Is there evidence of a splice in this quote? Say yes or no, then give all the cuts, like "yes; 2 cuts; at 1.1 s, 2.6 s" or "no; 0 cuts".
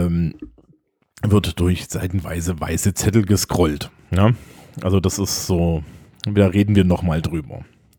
no; 0 cuts